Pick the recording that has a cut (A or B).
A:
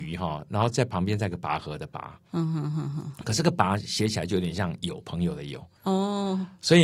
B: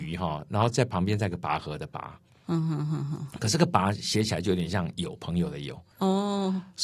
A